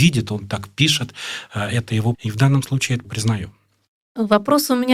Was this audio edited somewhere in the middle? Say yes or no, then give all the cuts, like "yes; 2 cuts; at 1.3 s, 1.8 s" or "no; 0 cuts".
yes; 2 cuts; at 2.1 s, 3.0 s